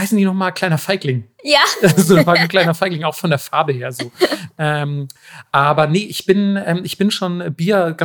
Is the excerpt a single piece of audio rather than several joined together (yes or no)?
yes